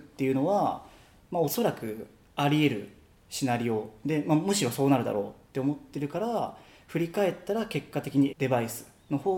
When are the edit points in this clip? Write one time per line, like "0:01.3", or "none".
0:08.3